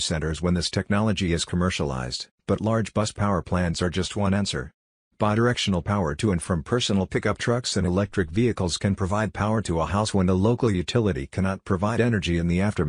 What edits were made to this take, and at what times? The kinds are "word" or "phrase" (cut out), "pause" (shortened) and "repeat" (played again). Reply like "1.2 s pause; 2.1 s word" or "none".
none